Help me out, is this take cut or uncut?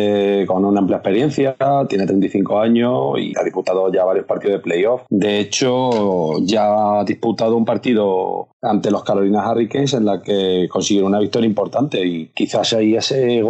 uncut